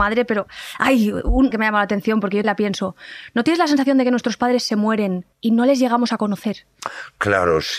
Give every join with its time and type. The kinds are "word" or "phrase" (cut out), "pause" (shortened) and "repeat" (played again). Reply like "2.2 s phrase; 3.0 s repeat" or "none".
1.5 s phrase; 2.4 s word; 5.3 s pause